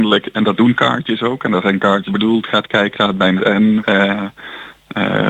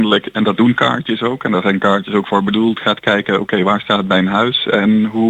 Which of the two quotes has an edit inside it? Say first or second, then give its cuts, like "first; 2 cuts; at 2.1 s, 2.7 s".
first; 4 cuts; at 2.1 s, 2.9 s, 3.4 s, 3.8 s